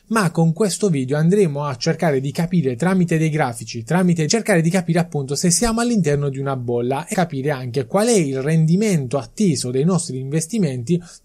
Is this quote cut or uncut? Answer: cut